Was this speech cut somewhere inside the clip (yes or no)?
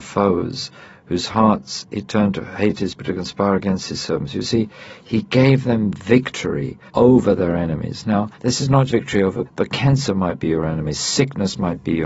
yes